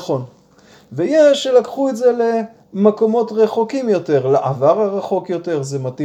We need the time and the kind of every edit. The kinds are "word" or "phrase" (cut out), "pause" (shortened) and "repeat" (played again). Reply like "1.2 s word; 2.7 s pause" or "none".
none